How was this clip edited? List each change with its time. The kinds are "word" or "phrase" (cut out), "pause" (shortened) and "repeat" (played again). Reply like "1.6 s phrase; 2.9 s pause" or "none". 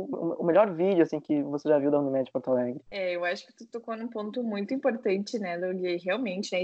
2.9 s pause